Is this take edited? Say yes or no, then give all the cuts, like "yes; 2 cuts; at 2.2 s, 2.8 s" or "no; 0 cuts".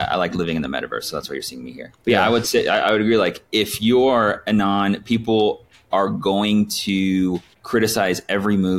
yes; 4 cuts; at 2.0 s, 3.5 s, 5.7 s, 7.5 s